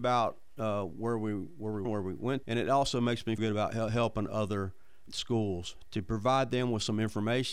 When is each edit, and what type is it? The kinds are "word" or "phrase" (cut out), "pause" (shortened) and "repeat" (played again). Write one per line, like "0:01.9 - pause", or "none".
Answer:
0:01.8 - word
0:02.4 - word
0:03.4 - word
0:05.1 - word
0:05.9 - word